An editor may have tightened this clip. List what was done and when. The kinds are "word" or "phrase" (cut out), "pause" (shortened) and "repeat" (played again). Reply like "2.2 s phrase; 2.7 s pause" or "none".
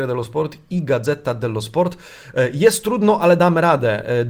none

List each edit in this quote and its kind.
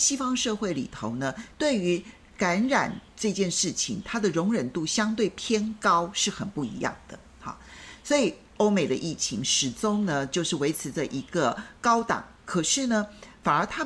3.1 s pause

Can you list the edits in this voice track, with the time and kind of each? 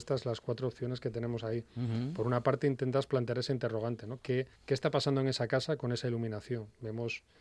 4.5 s pause

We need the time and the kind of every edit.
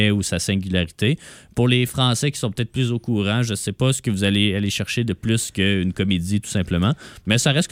none

